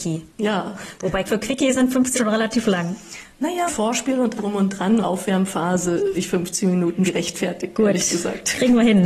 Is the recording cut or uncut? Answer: cut